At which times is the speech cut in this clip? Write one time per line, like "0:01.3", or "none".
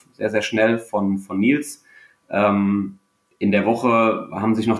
none